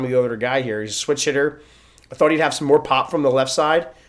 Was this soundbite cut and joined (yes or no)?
no